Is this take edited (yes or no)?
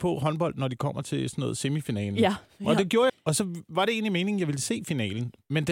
yes